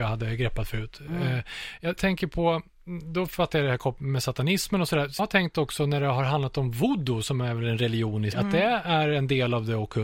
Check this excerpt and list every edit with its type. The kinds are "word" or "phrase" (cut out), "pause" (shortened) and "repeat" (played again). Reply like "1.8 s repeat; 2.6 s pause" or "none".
2.0 s word; 5.2 s word; 8.3 s word